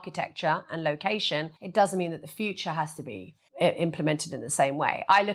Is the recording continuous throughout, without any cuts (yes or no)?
no